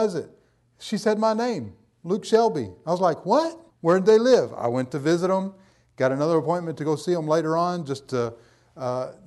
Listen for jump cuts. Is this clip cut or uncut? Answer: cut